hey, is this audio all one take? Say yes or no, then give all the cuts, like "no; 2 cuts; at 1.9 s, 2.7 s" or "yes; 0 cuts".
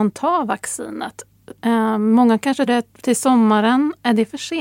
no; 1 cut; at 2.7 s